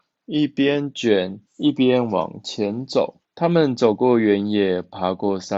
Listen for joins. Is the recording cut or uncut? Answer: cut